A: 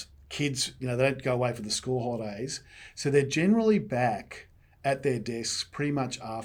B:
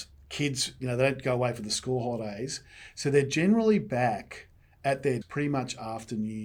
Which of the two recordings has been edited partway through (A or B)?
B